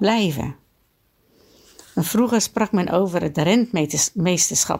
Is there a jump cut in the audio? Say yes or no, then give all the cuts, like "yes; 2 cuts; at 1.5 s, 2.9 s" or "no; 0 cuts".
no; 0 cuts